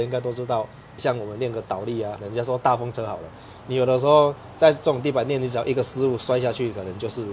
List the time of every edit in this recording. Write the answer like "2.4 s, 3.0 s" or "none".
1.0 s, 2.2 s